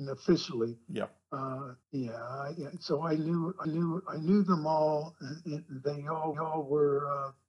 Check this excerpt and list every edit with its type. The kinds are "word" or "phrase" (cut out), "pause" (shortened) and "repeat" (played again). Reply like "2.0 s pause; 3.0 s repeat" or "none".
1.8 s pause; 3.6 s repeat; 6.3 s repeat